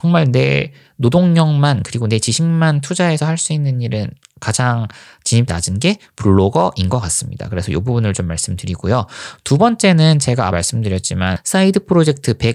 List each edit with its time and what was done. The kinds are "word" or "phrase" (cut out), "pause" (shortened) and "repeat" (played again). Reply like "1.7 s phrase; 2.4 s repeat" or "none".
5.5 s word; 10.5 s word